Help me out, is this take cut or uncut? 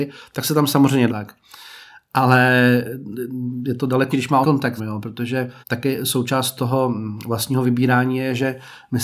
cut